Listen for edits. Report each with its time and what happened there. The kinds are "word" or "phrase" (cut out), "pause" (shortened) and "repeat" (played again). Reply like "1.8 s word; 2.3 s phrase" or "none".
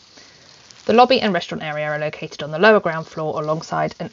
none